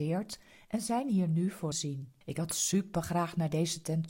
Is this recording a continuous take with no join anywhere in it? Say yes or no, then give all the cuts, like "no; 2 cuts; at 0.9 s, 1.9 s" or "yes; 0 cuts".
no; 2 cuts; at 1.7 s, 2.2 s